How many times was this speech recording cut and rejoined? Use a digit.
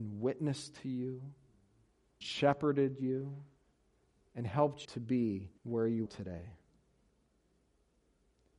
4